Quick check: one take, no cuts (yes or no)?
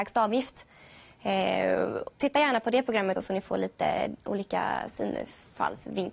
no